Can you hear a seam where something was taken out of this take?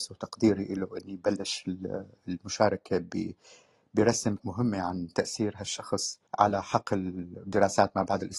yes; 2 cuts; at 4.4 s, 6.3 s

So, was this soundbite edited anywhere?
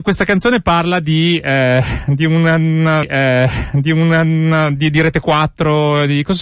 yes; 1 cut; at 3.0 s

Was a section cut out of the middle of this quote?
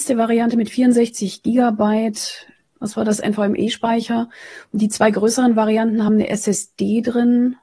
no; 0 cuts

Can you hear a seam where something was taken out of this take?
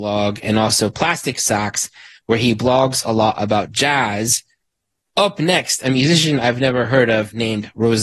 no; 0 cuts

